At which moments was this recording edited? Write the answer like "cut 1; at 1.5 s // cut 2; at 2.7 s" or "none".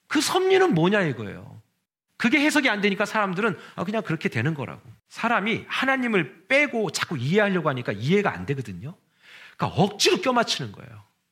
cut 1; at 1.9 s // cut 2; at 5.0 s